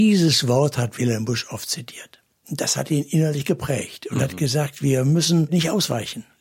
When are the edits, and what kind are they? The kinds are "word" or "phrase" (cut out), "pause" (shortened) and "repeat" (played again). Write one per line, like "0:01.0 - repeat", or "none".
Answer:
none